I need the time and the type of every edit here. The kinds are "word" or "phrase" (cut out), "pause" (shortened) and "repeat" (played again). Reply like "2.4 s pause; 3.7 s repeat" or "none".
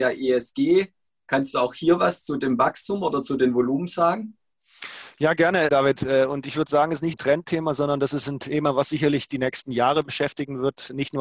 5.7 s word; 7.1 s word; 8.9 s word